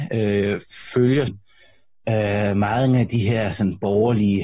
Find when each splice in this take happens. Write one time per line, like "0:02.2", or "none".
0:01.3